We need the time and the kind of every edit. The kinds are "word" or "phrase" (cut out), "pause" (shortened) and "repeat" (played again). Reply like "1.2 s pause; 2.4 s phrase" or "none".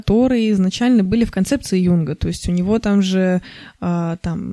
none